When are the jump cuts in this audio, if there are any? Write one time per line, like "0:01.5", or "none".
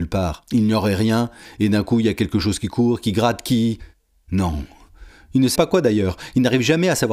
0:05.6